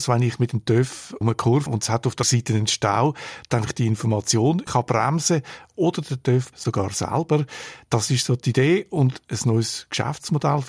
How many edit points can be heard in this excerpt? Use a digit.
6